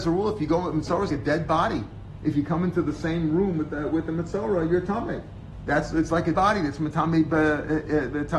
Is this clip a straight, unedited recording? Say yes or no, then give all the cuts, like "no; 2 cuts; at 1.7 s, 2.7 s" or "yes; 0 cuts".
no; 2 cuts; at 1.1 s, 6.3 s